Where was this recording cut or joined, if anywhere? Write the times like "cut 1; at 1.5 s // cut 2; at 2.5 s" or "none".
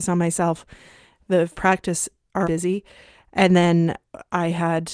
cut 1; at 1.5 s // cut 2; at 2.4 s